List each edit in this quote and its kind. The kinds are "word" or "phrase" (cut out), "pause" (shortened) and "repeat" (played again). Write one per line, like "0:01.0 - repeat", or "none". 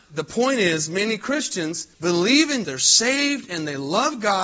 0:01.9 - pause
0:02.6 - word